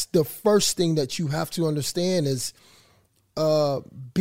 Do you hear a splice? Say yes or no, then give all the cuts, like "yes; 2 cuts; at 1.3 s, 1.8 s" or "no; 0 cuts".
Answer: no; 0 cuts